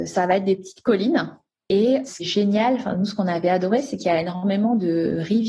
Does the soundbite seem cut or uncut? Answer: cut